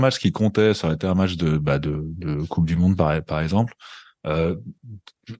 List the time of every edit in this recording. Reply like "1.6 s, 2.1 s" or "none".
none